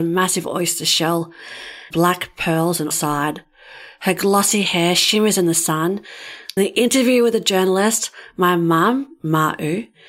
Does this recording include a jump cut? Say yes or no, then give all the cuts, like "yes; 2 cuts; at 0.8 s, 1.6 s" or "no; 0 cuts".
yes; 3 cuts; at 1.9 s, 2.9 s, 6.6 s